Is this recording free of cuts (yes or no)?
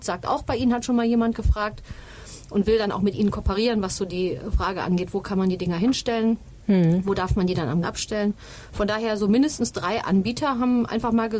no